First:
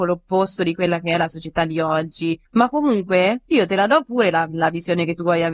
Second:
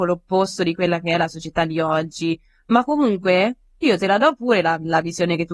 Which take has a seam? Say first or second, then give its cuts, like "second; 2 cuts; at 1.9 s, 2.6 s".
first; 2 cuts; at 2.5 s, 3.5 s